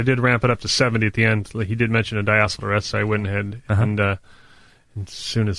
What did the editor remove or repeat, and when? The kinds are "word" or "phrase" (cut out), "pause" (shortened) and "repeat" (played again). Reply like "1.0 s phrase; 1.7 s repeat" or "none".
none